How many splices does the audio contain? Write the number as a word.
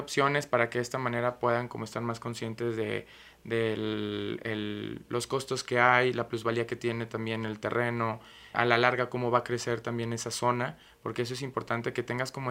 one